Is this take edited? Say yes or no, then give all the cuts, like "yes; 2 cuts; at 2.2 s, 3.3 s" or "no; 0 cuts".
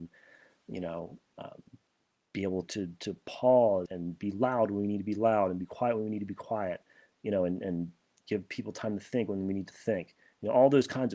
yes; 2 cuts; at 2.6 s, 3.9 s